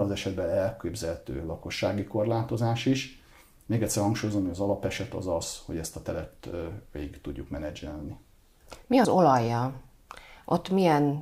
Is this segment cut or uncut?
cut